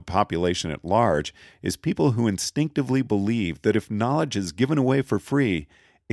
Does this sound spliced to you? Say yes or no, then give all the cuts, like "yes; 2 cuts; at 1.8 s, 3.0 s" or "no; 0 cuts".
no; 0 cuts